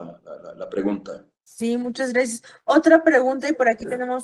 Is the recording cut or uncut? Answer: cut